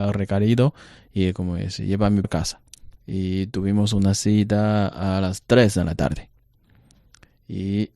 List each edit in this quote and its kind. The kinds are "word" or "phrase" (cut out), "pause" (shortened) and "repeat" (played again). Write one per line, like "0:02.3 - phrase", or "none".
0:02.2 - word
0:03.0 - pause